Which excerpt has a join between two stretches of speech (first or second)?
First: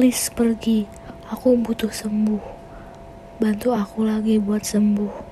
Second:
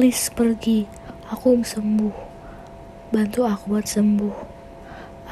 second